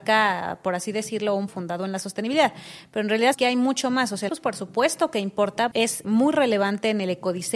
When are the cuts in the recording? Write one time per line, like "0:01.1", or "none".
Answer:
0:01.5
0:03.3
0:04.3
0:05.7
0:06.0